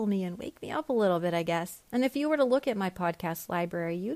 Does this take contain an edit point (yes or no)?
yes